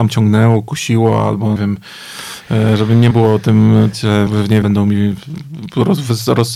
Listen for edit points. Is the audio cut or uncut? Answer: cut